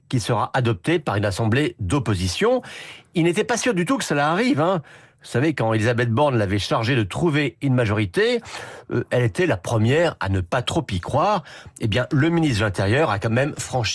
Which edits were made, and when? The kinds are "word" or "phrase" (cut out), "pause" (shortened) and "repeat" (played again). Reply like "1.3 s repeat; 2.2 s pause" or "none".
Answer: none